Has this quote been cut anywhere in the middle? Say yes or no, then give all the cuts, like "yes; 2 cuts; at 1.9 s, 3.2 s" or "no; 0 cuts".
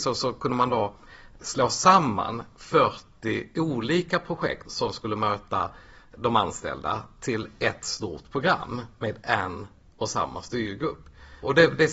yes; 1 cut; at 4.6 s